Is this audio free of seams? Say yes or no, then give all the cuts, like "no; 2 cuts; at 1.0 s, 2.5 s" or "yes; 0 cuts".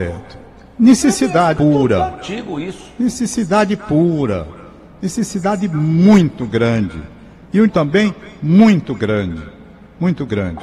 no; 2 cuts; at 1.6 s, 7.7 s